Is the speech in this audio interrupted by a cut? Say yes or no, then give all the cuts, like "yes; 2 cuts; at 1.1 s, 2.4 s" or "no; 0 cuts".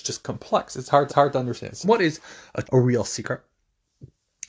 yes; 3 cuts; at 1.1 s, 1.8 s, 2.6 s